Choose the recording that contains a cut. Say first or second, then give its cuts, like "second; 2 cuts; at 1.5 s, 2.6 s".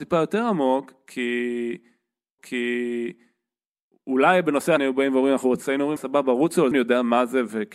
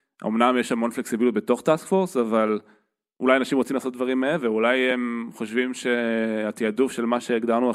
first; 5 cuts; at 2.4 s, 4.8 s, 5.6 s, 6.0 s, 6.7 s